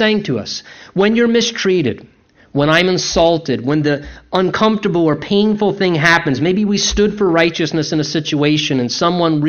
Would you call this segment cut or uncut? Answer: uncut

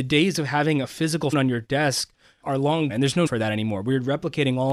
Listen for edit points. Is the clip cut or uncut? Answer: cut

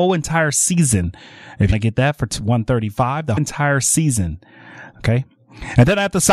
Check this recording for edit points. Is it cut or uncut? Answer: cut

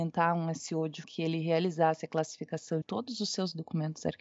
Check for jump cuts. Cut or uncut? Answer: cut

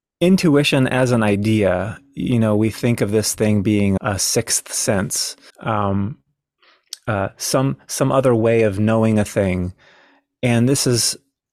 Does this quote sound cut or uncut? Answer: cut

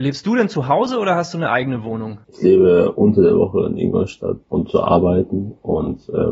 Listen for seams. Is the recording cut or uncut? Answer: cut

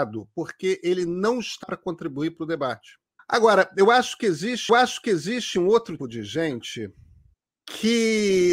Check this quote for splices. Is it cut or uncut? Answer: cut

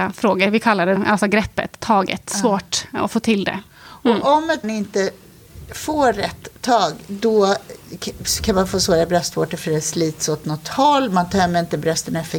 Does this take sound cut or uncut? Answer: cut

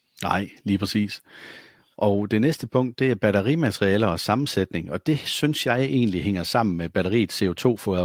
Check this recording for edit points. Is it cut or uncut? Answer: uncut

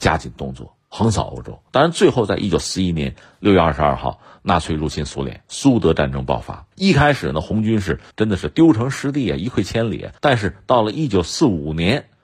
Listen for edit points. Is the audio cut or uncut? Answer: cut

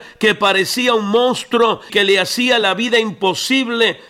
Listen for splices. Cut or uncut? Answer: cut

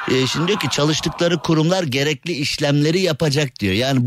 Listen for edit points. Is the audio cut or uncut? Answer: uncut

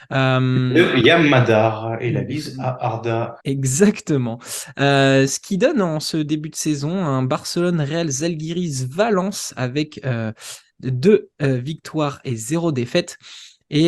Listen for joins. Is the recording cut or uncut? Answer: cut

